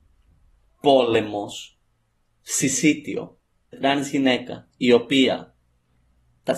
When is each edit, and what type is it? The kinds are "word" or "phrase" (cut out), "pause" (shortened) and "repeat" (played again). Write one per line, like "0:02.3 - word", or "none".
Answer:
0:03.7 - word

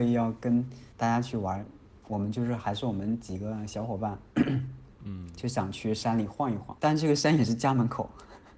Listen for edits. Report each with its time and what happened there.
0:00.9 - pause
0:02.0 - word
0:04.9 - pause
0:06.8 - pause

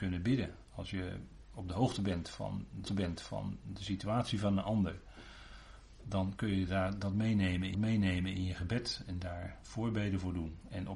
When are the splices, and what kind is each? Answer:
0:02.9 - repeat
0:07.7 - repeat

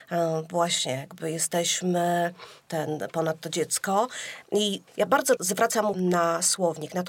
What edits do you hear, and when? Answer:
0:02.7 - word
0:04.9 - pause
0:05.4 - word
0:05.9 - word

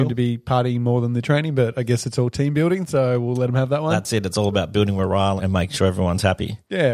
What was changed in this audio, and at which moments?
0:05.4 - word

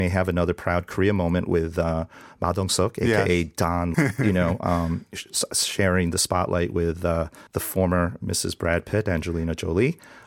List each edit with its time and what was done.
0:03.9 - word
0:07.5 - pause

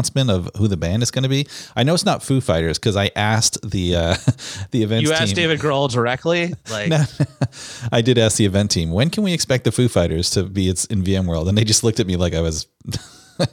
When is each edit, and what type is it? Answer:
none

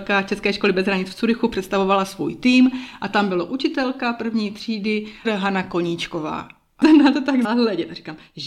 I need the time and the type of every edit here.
0:05.2 - word
0:06.8 - word
0:07.4 - word

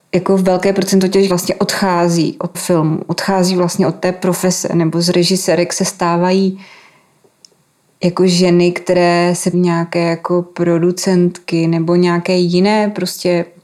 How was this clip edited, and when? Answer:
0:01.3 - word
0:02.5 - word
0:09.5 - word

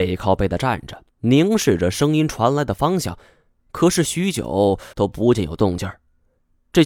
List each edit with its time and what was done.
0:01.1 - pause
0:04.9 - pause

